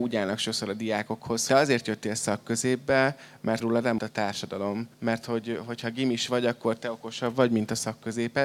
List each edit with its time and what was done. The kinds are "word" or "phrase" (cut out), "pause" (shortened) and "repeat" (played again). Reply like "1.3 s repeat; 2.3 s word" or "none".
1.5 s phrase; 3.6 s word; 4.0 s word; 4.9 s pause

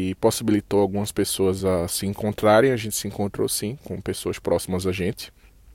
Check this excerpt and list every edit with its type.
none

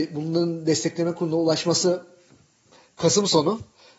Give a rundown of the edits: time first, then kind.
none

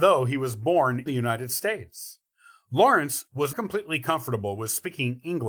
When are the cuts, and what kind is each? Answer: 1.1 s word; 3.5 s word

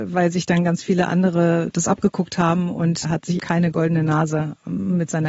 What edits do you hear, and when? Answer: 3.0 s word; 3.4 s word

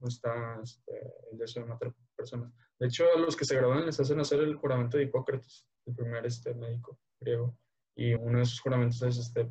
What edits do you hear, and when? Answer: 5.8 s pause; 8.2 s word

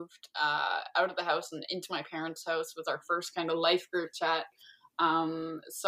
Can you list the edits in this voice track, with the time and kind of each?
none

